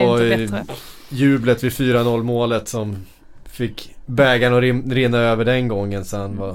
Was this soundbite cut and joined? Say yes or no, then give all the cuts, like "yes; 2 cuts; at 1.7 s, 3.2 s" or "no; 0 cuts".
no; 0 cuts